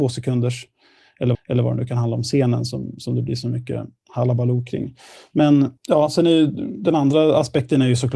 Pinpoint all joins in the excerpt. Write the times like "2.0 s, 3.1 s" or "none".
1.3 s, 5.8 s